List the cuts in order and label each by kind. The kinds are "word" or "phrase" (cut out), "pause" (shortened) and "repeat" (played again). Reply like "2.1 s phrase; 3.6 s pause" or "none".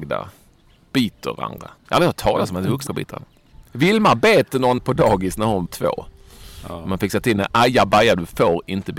1.8 s pause; 2.9 s word; 4.8 s word; 5.7 s word